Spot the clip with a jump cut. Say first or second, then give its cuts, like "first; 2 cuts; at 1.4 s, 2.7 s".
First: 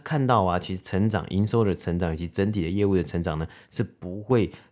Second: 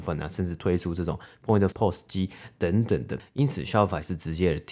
second; 1 cut; at 1.7 s